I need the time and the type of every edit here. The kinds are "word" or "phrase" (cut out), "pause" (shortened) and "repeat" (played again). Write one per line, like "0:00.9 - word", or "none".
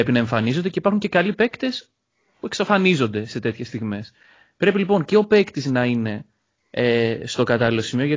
none